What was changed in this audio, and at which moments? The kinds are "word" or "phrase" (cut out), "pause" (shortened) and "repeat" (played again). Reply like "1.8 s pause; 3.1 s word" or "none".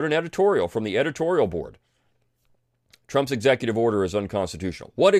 none